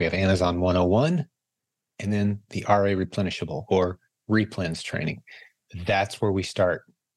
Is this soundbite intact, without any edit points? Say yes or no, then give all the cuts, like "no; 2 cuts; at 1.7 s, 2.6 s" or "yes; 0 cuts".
yes; 0 cuts